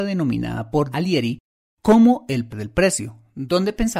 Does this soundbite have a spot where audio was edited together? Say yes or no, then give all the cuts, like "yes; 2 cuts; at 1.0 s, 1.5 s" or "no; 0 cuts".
yes; 2 cuts; at 0.9 s, 2.5 s